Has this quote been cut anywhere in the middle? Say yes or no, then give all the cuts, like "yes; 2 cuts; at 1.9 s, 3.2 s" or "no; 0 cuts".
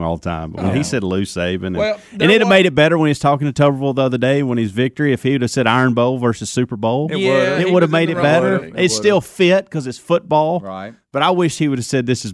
no; 0 cuts